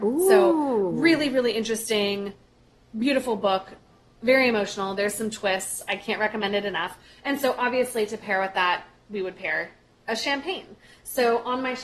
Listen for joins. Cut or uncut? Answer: uncut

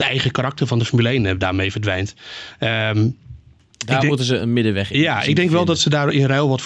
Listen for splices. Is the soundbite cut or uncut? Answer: uncut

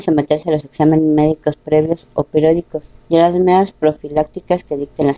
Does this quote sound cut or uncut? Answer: cut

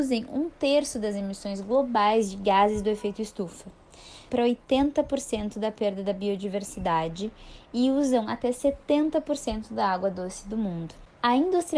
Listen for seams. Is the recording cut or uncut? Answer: cut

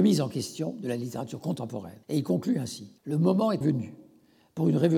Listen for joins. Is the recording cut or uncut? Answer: cut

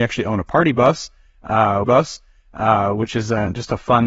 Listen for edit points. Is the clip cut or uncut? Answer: cut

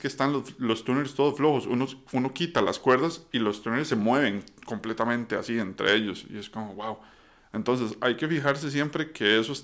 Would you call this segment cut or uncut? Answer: uncut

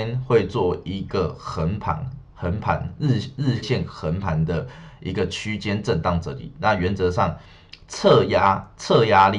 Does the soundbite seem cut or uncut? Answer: cut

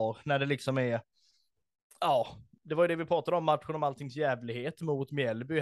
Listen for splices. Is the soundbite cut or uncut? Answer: uncut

